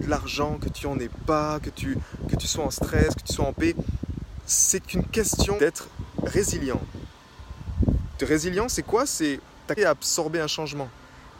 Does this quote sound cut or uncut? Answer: cut